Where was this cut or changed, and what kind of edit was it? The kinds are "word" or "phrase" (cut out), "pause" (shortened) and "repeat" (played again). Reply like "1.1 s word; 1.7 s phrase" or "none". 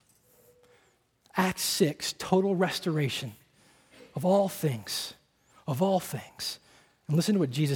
none